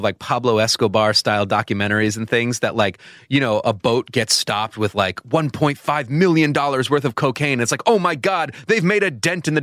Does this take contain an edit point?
no; 0 cuts

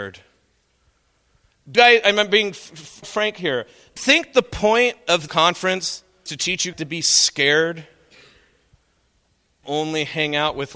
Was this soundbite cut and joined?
yes; 7 cuts; at 1.7 s, 3.0 s, 4.0 s, 5.3 s, 6.3 s, 6.7 s, 9.6 s

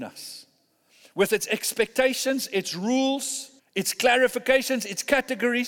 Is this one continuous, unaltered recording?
no; 1 cut; at 3.6 s

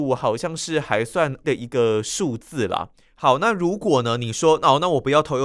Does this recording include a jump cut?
yes; 1 cut; at 1.4 s

